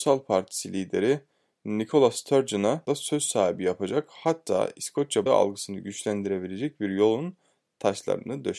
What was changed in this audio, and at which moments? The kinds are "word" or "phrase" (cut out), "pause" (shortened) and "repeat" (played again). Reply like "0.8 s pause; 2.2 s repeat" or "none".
2.9 s word; 5.3 s word